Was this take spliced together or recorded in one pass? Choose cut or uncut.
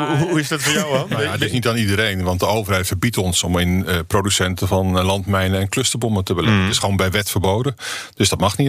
uncut